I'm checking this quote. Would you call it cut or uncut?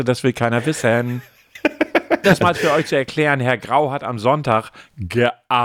cut